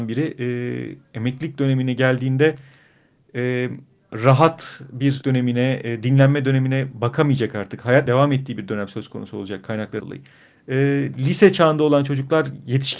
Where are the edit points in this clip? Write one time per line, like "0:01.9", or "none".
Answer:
0:05.2
0:08.1
0:10.0